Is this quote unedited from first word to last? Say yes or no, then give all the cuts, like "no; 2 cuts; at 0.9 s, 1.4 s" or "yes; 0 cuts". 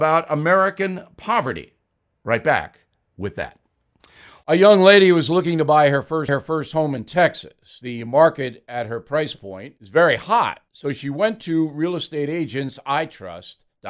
no; 1 cut; at 6.3 s